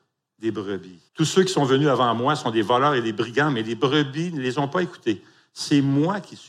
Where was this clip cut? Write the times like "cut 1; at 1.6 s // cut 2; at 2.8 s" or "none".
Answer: cut 1; at 1.1 s